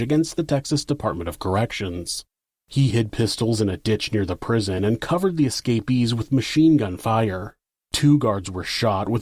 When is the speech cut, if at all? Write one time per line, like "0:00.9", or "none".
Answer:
none